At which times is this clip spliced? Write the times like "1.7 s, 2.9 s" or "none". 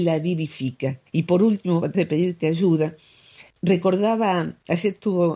1.1 s, 1.9 s, 3.5 s